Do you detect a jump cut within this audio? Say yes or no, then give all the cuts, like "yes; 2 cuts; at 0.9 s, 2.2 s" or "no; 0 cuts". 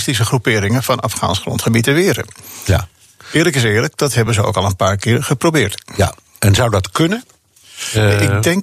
no; 0 cuts